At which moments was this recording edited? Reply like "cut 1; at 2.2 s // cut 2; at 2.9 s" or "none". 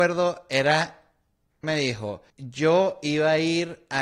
cut 1; at 1.6 s // cut 2; at 2.3 s

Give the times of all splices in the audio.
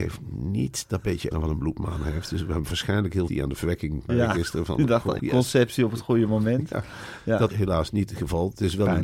cut 1; at 1.3 s // cut 2; at 3.3 s // cut 3; at 4.1 s // cut 4; at 5.2 s // cut 5; at 7.5 s

